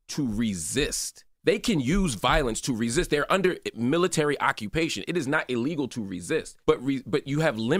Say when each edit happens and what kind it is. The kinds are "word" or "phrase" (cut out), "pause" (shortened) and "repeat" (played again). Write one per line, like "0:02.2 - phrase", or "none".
0:01.3 - pause
0:06.6 - pause